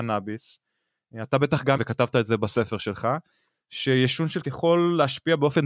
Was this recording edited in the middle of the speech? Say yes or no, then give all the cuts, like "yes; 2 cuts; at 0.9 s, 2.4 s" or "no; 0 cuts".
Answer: yes; 2 cuts; at 1.8 s, 4.4 s